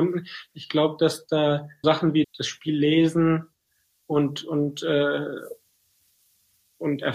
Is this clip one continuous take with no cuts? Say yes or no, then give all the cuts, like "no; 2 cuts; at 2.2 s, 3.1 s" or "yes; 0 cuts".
no; 2 cuts; at 1.8 s, 2.2 s